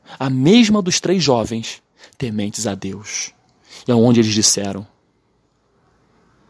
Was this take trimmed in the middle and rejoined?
no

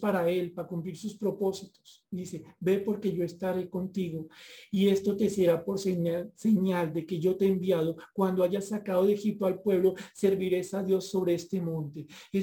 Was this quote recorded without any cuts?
yes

